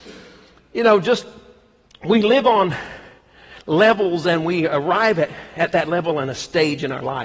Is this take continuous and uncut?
yes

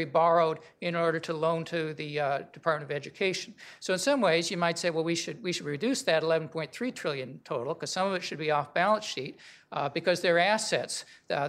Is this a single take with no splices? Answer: yes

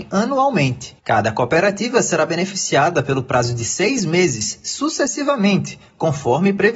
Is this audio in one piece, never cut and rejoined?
no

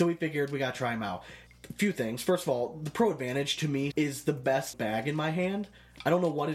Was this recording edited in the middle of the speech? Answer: yes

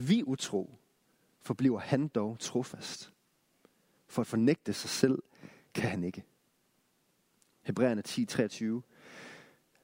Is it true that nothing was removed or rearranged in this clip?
yes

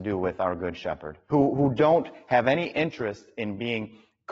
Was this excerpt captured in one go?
no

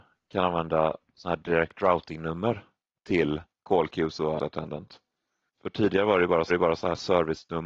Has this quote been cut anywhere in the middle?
yes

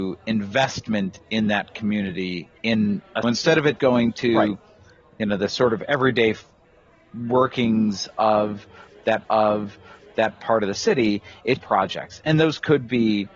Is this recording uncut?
no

